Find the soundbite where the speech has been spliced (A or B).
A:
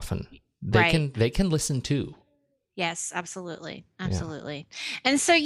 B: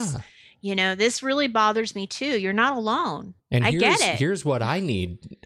B